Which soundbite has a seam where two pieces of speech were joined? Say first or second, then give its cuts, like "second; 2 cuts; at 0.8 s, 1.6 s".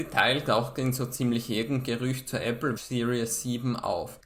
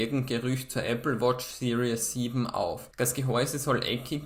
first; 1 cut; at 2.8 s